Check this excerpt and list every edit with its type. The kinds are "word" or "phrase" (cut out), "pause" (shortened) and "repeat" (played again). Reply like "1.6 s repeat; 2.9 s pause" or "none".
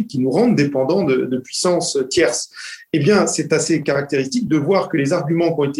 none